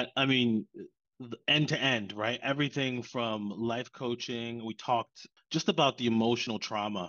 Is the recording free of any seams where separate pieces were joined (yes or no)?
no